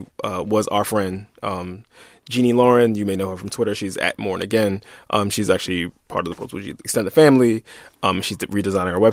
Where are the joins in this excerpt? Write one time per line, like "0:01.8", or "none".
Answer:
none